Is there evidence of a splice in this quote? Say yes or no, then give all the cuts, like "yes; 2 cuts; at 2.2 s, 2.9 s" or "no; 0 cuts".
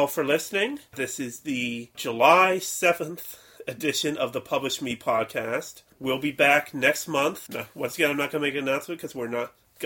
no; 0 cuts